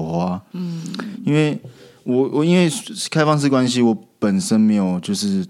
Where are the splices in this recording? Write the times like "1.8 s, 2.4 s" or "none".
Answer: none